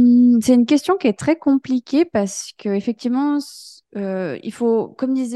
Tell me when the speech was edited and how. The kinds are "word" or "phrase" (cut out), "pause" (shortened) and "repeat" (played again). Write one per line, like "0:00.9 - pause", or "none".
0:03.8 - pause

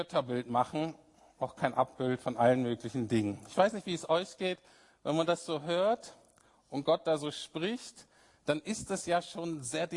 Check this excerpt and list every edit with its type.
none

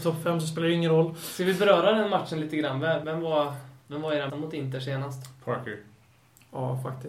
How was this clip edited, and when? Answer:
0:03.0 - word
0:03.8 - pause
0:04.3 - word

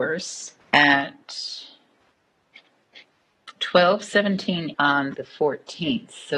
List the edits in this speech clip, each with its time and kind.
0:03.6 - word
0:04.7 - word
0:05.1 - word

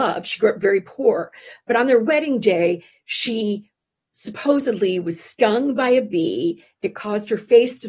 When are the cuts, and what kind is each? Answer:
none

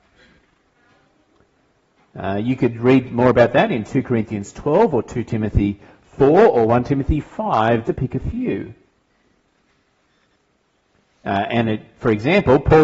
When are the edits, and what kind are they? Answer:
0:07.8 - word

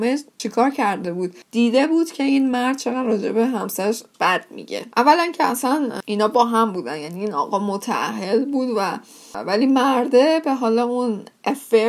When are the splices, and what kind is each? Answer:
0:01.4 - pause
0:04.1 - word

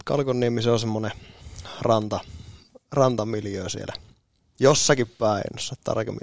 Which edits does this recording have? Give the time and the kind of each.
none

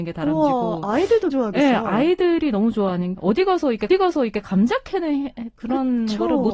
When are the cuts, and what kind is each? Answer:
0:01.3 - word
0:03.1 - word
0:03.9 - repeat

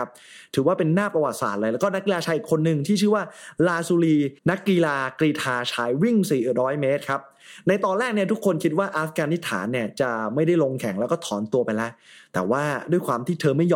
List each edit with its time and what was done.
0:04.4 - pause

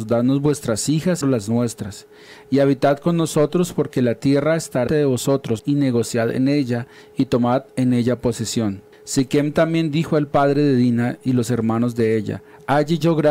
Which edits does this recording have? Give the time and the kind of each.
0:01.2 - phrase
0:04.9 - word
0:05.6 - word
0:08.9 - pause

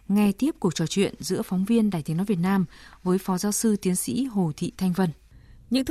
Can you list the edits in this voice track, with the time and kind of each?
none

